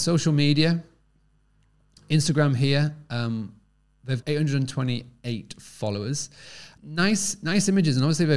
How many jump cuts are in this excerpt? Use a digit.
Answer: 2